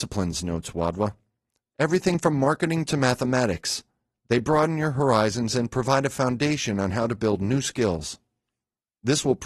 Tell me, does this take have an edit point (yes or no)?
no